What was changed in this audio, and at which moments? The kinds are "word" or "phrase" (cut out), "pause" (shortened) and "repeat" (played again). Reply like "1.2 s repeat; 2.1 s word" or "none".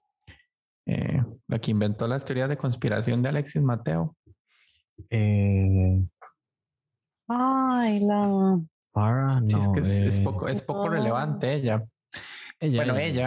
none